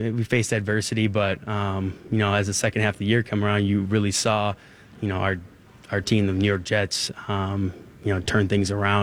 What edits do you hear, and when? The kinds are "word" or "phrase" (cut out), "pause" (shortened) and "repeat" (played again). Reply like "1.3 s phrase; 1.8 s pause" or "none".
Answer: none